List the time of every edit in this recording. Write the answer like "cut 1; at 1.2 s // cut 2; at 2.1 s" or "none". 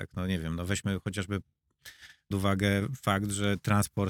cut 1; at 2.3 s

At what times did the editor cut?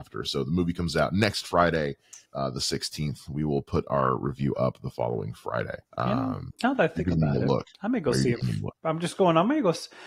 cut 1; at 2.3 s // cut 2; at 5.9 s // cut 3; at 7.7 s // cut 4; at 8.8 s

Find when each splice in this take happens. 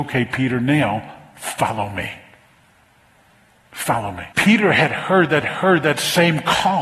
cut 1; at 4.3 s // cut 2; at 5.4 s

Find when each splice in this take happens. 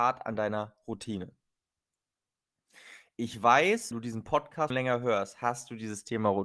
cut 1; at 3.9 s // cut 2; at 4.7 s

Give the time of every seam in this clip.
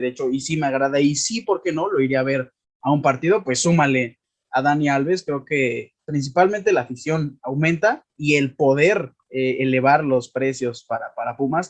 cut 1; at 8.1 s // cut 2; at 9.2 s

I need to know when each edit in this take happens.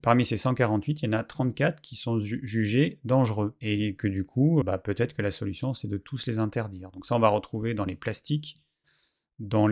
cut 1; at 4.6 s

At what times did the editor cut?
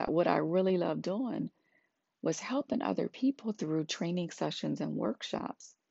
none

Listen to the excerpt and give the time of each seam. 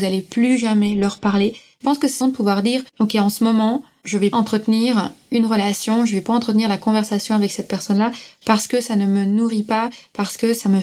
cut 1; at 1.8 s // cut 2; at 2.2 s // cut 3; at 2.9 s // cut 4; at 4.3 s

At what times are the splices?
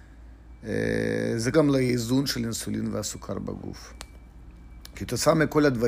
cut 1; at 1.5 s

